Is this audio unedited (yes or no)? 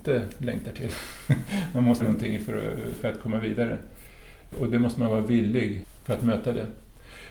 no